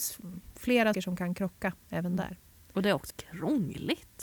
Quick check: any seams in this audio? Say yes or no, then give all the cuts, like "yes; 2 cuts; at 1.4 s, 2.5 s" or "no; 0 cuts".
yes; 2 cuts; at 0.9 s, 3.1 s